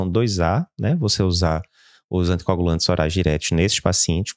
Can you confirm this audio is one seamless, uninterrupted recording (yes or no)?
yes